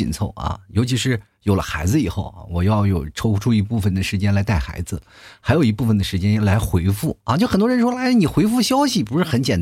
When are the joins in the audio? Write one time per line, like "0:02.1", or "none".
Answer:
none